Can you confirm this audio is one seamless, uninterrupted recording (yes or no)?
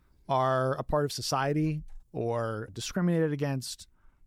no